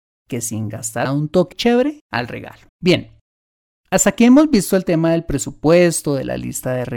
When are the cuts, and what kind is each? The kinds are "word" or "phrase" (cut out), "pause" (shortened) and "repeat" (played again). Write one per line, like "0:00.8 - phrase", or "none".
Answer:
0:01.0 - phrase
0:01.5 - word
0:02.7 - pause